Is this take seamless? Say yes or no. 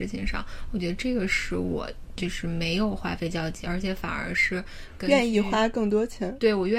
no